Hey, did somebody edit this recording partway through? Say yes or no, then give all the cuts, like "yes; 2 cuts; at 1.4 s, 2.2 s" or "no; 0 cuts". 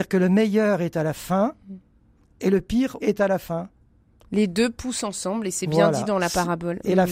yes; 1 cut; at 3.0 s